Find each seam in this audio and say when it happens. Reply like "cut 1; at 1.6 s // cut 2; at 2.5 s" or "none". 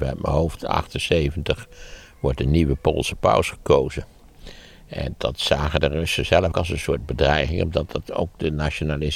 cut 1; at 5.1 s // cut 2; at 6.5 s